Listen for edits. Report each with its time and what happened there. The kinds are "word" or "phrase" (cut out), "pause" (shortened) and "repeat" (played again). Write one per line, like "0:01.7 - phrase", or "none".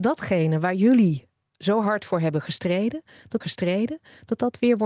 0:03.4 - repeat